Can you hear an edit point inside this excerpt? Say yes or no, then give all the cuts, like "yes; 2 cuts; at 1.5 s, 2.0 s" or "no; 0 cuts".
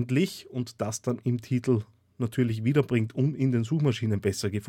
no; 0 cuts